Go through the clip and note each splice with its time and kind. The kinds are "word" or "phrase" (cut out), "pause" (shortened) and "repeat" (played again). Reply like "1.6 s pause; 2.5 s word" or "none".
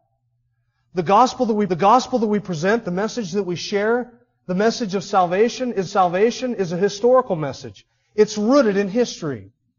1.7 s repeat; 5.9 s repeat